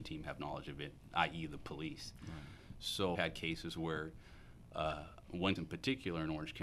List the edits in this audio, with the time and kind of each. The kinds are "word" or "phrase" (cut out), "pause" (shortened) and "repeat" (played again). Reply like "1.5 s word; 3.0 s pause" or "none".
3.1 s word; 5.6 s word